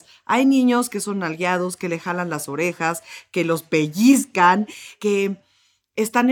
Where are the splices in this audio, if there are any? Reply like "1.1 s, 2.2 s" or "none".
none